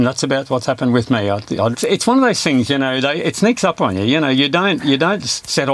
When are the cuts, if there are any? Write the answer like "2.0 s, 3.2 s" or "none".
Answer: 1.7 s